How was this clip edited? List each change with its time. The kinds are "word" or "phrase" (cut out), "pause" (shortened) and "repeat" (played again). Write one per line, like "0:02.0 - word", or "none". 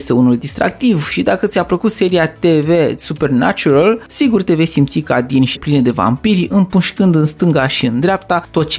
0:05.6 - phrase